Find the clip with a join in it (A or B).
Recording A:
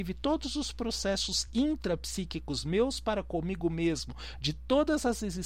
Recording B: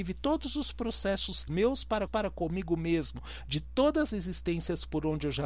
B